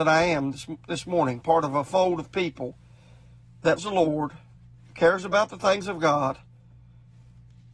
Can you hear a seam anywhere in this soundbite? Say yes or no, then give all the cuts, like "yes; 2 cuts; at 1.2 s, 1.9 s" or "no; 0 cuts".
yes; 1 cut; at 3.8 s